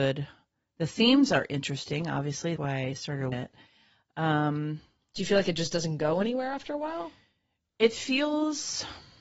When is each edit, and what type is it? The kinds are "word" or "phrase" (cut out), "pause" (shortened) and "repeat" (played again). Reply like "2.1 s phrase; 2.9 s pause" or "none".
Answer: 2.6 s word; 3.3 s word